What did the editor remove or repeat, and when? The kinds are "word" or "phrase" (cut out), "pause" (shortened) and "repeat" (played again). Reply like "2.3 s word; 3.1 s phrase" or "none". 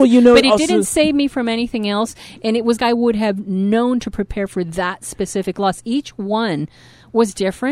2.8 s phrase